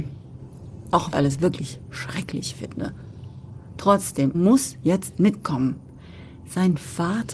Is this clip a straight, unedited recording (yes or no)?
no